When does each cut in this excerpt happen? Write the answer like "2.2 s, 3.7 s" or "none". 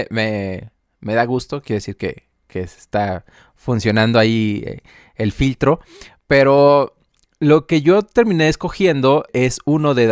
none